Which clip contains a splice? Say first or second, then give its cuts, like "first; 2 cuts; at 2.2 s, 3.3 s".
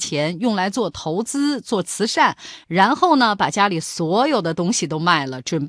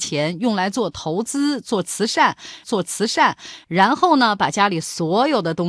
second; 1 cut; at 2.6 s